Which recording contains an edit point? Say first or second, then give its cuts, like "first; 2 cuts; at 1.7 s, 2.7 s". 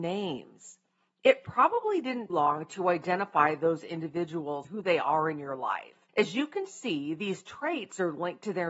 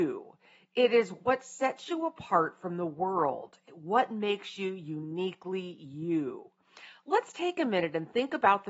first; 3 cuts; at 2.3 s, 4.6 s, 6.1 s